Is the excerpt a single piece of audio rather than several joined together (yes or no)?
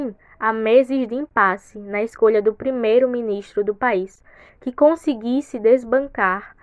yes